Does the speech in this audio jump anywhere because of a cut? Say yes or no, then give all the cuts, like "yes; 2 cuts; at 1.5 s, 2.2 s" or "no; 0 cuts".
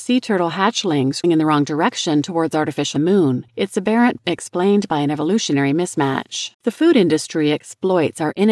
yes; 5 cuts; at 1.2 s, 3.0 s, 3.5 s, 4.2 s, 6.5 s